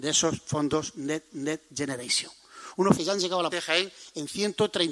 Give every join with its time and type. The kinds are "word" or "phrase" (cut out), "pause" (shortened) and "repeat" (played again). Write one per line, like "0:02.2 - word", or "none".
0:01.3 - repeat
0:02.9 - word
0:03.5 - word